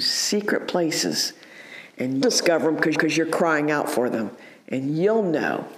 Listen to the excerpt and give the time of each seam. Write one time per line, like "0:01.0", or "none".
0:02.2
0:02.9